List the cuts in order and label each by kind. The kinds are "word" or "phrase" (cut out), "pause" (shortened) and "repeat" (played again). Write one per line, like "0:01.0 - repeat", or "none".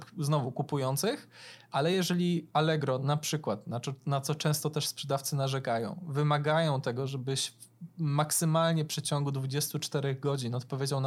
none

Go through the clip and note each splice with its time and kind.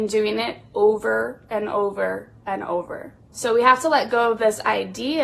0:03.2 - pause

